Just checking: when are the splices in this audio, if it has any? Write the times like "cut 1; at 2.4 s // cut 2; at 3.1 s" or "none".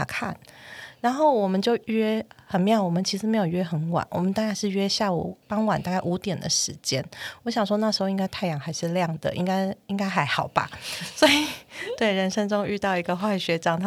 cut 1; at 5.4 s